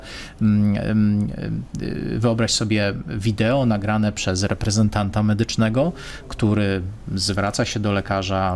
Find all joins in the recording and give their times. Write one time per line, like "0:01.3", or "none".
none